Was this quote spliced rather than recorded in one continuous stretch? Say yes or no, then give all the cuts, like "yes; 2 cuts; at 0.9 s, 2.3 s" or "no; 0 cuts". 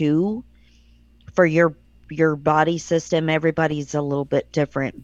no; 0 cuts